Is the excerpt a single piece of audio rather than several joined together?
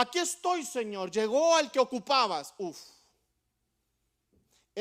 yes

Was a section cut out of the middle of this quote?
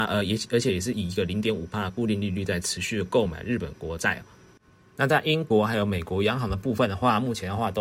no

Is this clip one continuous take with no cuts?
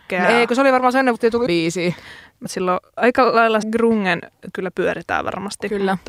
no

